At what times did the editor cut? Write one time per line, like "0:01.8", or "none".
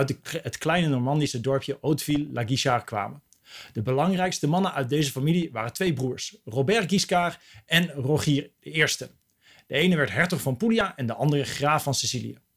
none